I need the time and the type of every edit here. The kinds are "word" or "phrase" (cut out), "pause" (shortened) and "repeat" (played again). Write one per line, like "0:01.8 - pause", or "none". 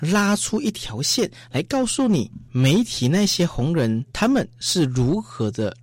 0:04.1 - pause

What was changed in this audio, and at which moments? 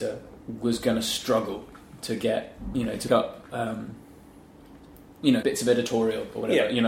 0:03.1 - word
0:05.4 - word

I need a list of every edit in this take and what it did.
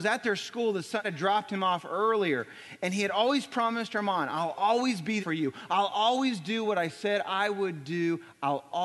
0:01.0 - phrase
0:05.2 - word

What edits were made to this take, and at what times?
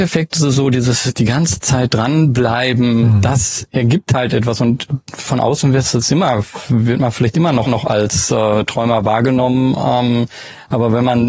0:07.7 - repeat

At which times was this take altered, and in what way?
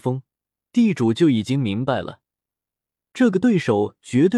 none

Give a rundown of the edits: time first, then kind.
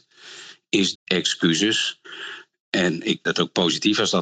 0:00.9 - word
0:03.3 - word

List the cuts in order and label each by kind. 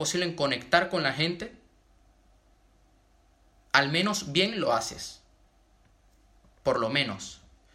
none

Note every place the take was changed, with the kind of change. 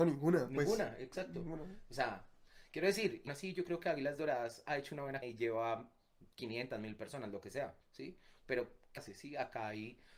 0:03.3 - word
0:05.2 - word
0:07.8 - pause
0:09.0 - word

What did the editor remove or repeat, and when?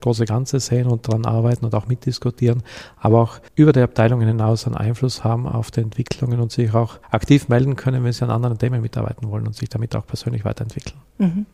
0:03.5 - pause
0:07.0 - pause

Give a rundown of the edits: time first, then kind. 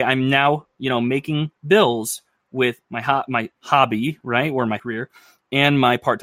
0:01.6 - pause
0:02.8 - pause
0:03.5 - pause
0:04.8 - word

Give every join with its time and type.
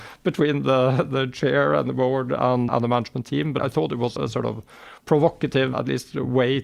0:02.7 - word
0:03.6 - word
0:04.2 - word
0:05.7 - word

